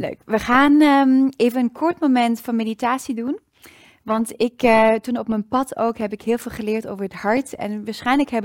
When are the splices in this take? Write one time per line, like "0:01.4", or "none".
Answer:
none